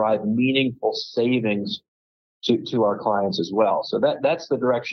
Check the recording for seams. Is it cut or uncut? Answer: uncut